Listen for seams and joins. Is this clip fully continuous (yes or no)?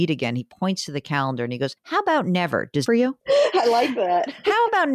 no